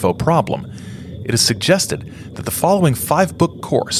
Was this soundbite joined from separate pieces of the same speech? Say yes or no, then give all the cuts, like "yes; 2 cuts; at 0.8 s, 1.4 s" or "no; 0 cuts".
no; 0 cuts